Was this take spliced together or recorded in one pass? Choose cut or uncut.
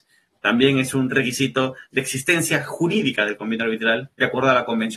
uncut